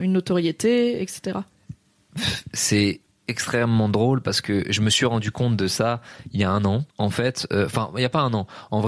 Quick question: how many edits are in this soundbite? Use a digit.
2